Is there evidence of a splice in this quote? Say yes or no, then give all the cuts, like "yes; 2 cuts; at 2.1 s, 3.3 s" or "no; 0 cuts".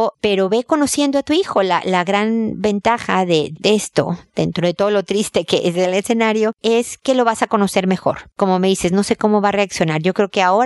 no; 0 cuts